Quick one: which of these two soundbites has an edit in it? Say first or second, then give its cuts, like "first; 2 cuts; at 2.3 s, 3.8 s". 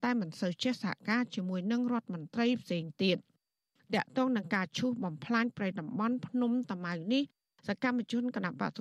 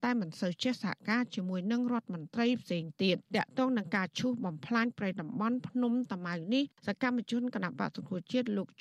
second; 2 cuts; at 3.3 s, 6.8 s